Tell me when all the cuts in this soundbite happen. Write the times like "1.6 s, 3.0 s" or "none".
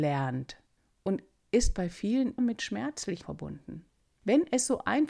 2.4 s, 3.2 s